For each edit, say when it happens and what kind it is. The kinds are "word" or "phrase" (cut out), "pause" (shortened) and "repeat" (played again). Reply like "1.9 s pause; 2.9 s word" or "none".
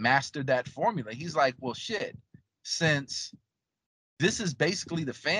none